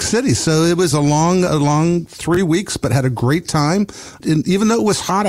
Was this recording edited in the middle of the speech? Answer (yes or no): yes